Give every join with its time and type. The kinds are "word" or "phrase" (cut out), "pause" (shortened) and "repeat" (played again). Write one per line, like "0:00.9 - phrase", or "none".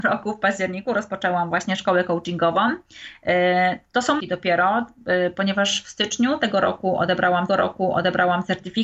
0:04.2 - phrase
0:07.5 - repeat